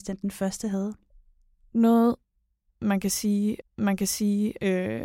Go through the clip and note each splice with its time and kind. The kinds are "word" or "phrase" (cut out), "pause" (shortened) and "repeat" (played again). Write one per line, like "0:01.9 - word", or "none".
0:03.6 - repeat

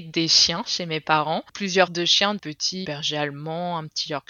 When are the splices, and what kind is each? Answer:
0:01.9 - word
0:02.4 - phrase
0:02.8 - phrase

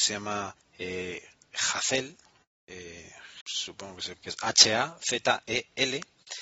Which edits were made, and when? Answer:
0:03.4 - word
0:04.2 - word

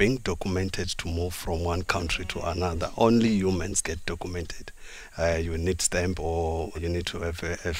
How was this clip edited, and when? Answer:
0:03.8 - word
0:06.7 - word

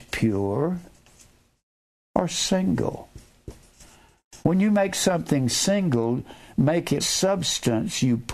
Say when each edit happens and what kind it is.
0:04.4 - pause
0:07.0 - word

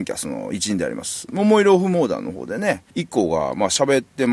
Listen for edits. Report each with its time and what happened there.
0:02.9 - pause

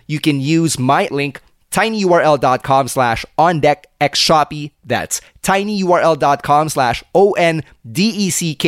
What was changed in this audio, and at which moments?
0:01.1 - word

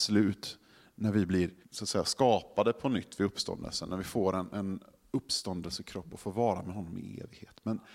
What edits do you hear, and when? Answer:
0:01.6 - pause

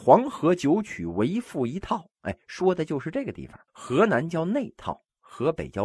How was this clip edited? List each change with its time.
0:02.1 - pause
0:03.7 - pause

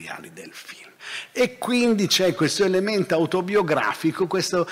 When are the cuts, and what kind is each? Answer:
none

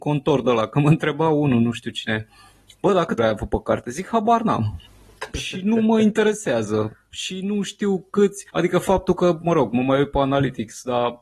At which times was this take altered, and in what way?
0:03.2 - word
0:04.9 - pause
0:08.5 - pause

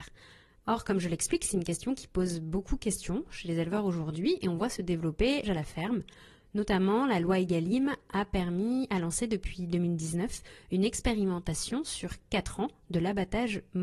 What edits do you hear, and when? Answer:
0:05.4 - word

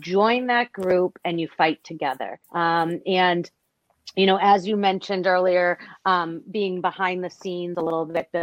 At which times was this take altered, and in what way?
0:02.4 - pause

